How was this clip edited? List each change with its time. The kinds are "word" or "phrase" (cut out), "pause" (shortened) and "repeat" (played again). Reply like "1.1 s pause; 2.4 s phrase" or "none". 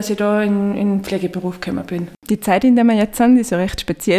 2.2 s pause